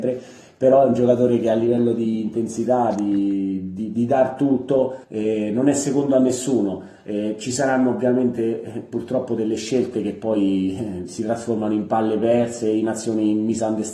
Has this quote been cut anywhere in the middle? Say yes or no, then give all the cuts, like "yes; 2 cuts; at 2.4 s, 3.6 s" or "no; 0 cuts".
yes; 1 cut; at 5.0 s